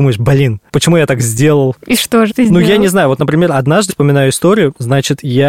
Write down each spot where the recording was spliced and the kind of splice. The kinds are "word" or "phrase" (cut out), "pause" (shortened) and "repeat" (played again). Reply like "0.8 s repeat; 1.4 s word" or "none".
2.3 s word; 3.9 s word

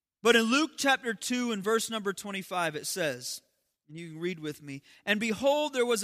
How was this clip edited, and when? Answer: none

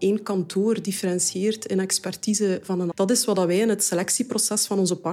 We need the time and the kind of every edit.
2.9 s phrase

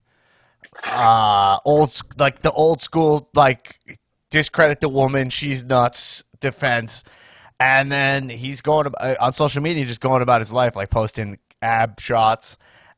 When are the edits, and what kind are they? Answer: none

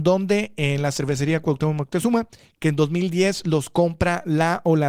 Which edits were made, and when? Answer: none

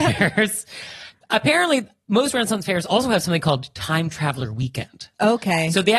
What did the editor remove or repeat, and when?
none

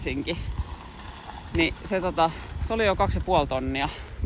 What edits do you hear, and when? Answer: none

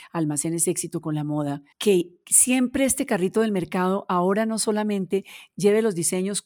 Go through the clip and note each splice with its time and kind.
1.7 s pause

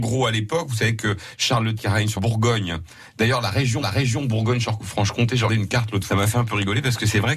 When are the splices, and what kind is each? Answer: 1.8 s word; 2.2 s word; 3.8 s repeat; 5.5 s word; 6.1 s phrase

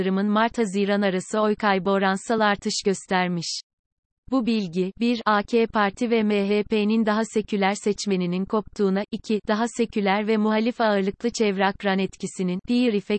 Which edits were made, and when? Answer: none

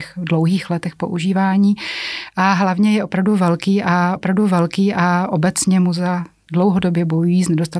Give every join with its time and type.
4.2 s repeat

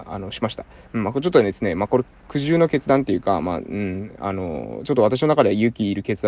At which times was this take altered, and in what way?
none

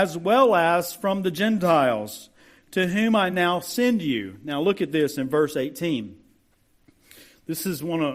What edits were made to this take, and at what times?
none

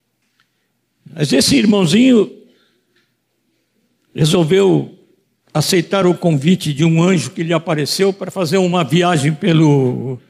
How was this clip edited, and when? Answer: none

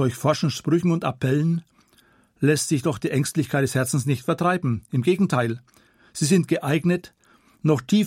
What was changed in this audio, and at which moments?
none

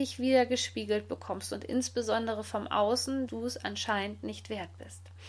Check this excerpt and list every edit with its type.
3.3 s word

